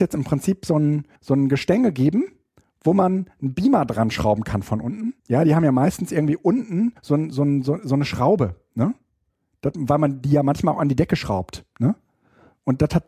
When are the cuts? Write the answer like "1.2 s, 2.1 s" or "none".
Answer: 1.2 s, 5.2 s, 7.0 s